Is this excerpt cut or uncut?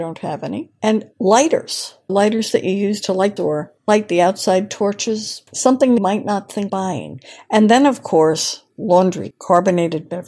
cut